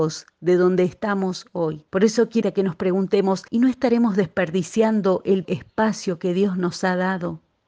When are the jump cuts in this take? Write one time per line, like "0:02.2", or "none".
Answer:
0:01.9
0:02.4
0:03.5
0:05.4